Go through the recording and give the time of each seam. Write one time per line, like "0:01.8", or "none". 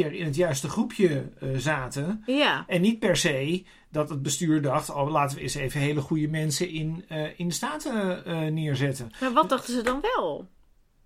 none